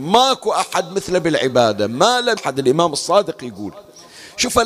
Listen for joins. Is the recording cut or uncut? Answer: cut